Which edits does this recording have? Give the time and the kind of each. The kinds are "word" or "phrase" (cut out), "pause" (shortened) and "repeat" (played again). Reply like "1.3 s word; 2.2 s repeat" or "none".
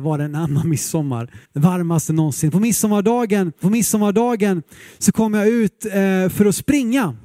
1.4 s pause; 3.6 s repeat